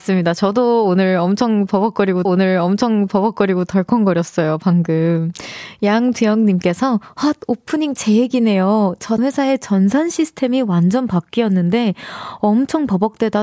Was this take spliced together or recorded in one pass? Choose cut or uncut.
cut